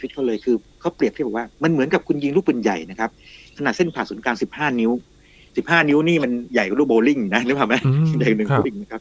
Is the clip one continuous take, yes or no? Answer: yes